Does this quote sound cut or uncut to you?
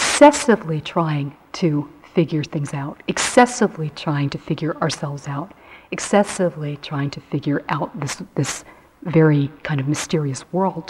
uncut